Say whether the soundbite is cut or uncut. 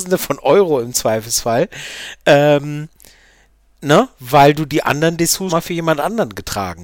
cut